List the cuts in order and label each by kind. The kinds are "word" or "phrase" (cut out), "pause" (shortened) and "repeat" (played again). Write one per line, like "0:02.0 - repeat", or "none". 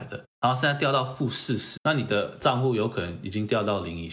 0:01.8 - word